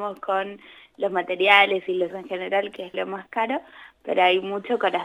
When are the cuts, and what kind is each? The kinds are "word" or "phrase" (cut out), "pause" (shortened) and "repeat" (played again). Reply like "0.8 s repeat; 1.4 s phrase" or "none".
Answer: 2.1 s word; 2.9 s word